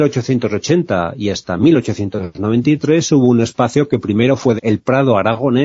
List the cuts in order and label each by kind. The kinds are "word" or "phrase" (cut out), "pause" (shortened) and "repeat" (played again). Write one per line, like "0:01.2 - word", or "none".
0:04.6 - word